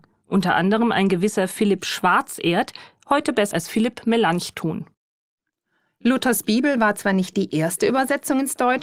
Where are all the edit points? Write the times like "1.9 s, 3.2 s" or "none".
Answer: 3.5 s